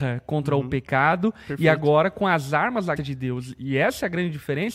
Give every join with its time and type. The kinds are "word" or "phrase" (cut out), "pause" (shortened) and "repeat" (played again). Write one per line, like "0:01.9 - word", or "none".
0:03.0 - word

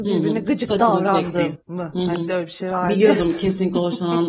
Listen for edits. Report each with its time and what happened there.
0:01.6 - pause

